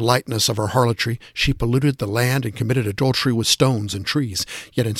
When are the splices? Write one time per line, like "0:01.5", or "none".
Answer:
none